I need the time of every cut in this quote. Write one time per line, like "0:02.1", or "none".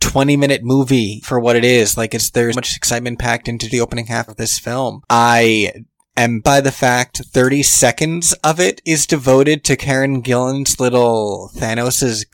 0:01.2
0:02.5
0:03.7
0:04.3
0:06.4
0:07.2